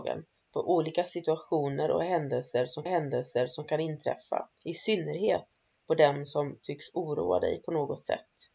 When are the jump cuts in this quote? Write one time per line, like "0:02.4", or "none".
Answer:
0:02.9
0:04.5